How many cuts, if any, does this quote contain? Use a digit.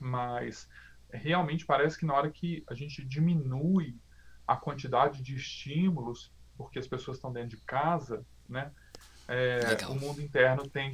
0